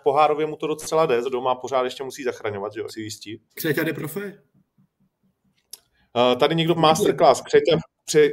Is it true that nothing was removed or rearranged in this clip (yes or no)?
no